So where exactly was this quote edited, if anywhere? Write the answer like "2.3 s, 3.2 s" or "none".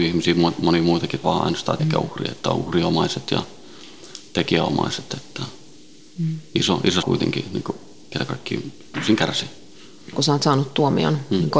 1.2 s, 1.8 s, 7.0 s